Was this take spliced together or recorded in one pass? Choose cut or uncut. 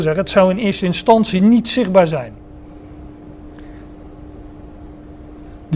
uncut